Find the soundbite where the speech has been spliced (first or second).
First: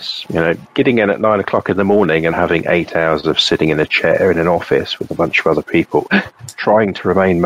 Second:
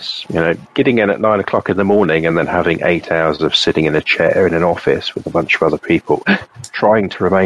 first